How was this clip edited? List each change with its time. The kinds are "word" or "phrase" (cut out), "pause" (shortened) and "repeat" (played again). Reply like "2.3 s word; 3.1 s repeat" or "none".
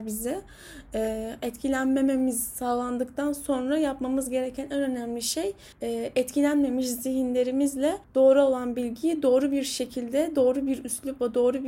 5.7 s pause; 8.0 s pause